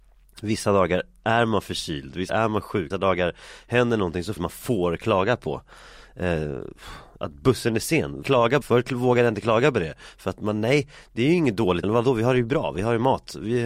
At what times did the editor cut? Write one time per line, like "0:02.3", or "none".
0:02.3
0:02.9
0:04.4
0:08.2
0:08.6
0:11.8